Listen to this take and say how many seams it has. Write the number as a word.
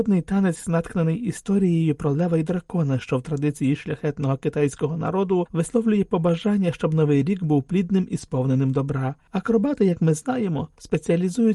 zero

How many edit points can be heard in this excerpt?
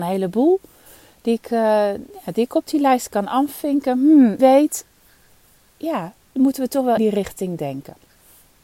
two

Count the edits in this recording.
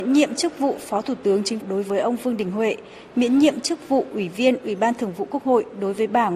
one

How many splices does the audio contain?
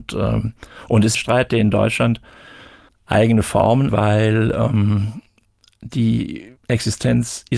four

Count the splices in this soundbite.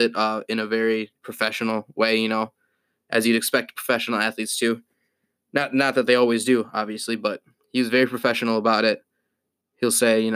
zero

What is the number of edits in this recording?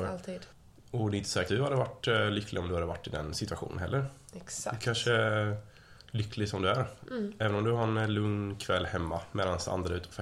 one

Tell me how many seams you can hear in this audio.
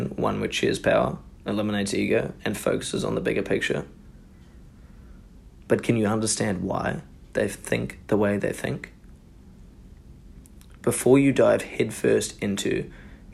zero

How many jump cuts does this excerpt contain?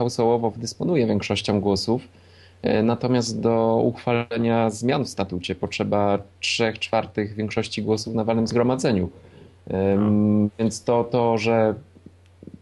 zero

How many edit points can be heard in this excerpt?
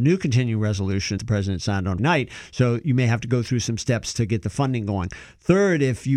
two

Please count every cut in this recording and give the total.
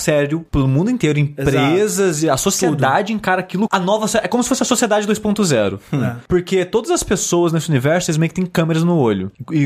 one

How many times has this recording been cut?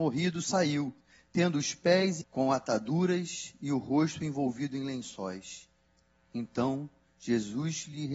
one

